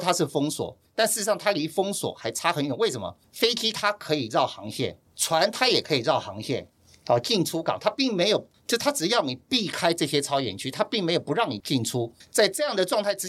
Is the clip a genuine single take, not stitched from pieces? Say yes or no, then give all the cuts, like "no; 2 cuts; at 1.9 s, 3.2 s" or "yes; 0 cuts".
yes; 0 cuts